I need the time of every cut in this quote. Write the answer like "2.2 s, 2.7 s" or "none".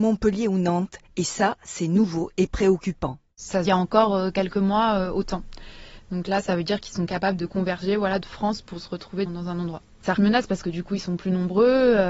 1.0 s, 3.7 s, 7.4 s, 8.2 s, 9.3 s, 10.2 s